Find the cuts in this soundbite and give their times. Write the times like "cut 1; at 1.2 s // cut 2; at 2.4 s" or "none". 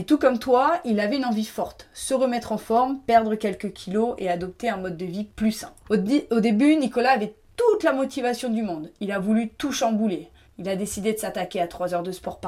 cut 1; at 5.8 s // cut 2; at 10.4 s